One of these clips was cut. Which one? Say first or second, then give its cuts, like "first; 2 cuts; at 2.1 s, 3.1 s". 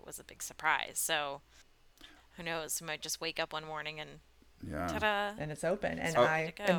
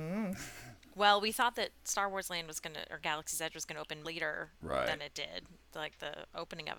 second; 1 cut; at 4.0 s